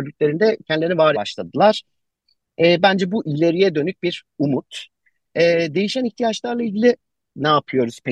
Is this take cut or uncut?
cut